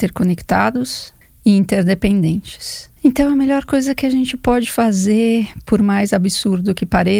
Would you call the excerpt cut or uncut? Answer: cut